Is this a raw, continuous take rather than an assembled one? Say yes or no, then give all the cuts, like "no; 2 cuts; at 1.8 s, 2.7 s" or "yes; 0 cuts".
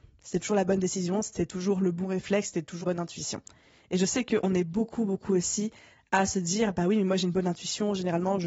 no; 1 cut; at 2.8 s